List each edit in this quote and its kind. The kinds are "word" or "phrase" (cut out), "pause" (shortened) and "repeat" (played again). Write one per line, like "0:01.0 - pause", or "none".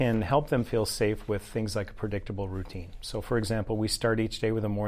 none